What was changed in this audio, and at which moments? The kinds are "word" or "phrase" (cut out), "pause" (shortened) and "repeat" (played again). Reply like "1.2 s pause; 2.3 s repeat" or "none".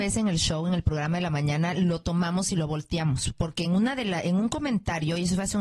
none